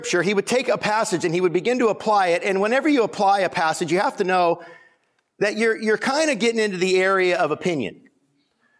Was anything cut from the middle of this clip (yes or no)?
no